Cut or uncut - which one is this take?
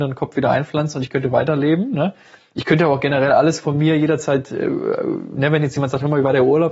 uncut